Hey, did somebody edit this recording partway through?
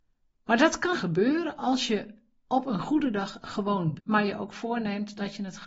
yes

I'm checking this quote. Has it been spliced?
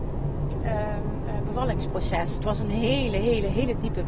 no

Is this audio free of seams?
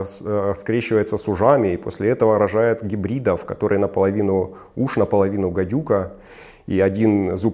yes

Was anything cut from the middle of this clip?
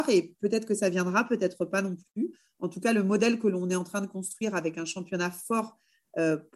no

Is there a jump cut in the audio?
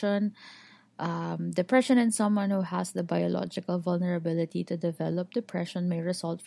no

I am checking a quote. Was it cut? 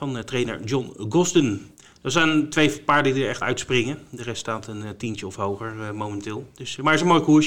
yes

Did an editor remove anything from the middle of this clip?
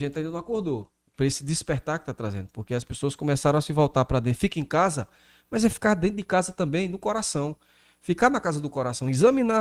no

